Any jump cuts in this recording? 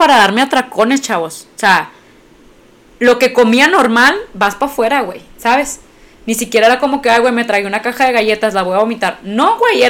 no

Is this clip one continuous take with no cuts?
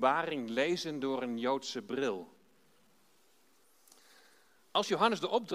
yes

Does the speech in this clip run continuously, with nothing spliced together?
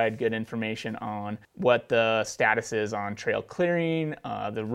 no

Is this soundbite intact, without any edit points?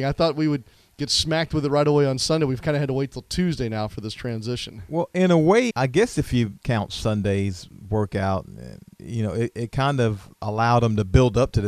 no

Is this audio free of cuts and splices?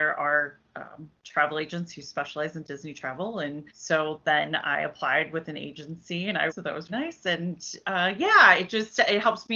no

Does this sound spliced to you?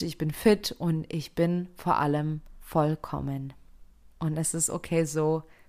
yes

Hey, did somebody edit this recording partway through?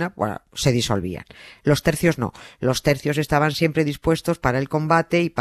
no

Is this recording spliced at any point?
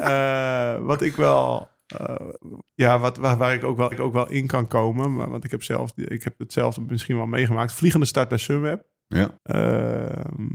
yes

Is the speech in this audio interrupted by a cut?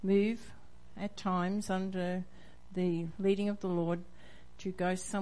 no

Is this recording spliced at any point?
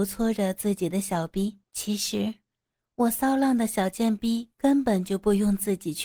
yes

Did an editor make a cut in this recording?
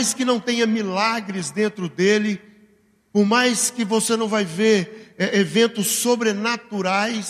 no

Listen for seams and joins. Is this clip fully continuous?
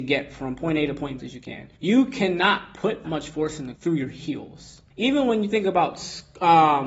no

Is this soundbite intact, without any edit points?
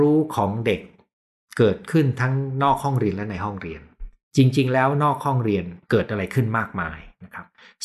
no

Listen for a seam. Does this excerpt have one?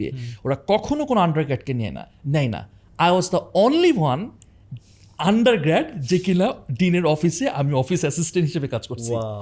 no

